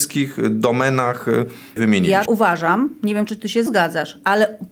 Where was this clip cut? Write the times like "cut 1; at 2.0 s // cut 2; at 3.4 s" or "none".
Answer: cut 1; at 1.8 s // cut 2; at 2.3 s // cut 3; at 3.7 s